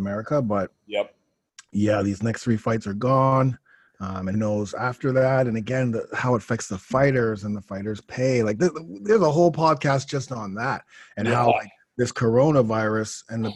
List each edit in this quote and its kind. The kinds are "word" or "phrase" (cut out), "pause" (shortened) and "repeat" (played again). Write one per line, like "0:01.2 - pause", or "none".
0:04.3 - word